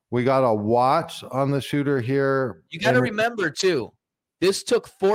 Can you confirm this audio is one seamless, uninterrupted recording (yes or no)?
yes